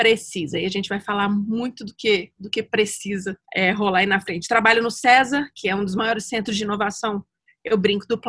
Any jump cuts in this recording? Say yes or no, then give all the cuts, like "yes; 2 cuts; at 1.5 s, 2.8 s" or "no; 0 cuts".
yes; 1 cut; at 3.4 s